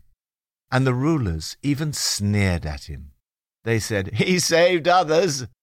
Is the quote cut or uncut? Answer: uncut